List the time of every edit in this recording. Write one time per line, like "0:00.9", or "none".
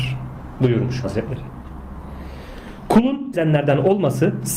0:01.0
0:03.3